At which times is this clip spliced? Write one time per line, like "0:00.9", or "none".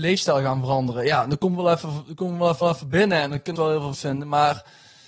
0:02.6
0:03.6
0:03.9

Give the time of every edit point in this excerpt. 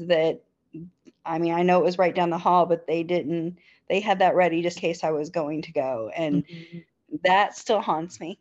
0:04.8

